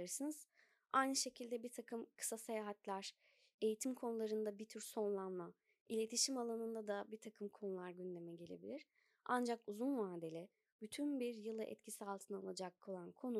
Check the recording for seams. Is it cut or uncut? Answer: uncut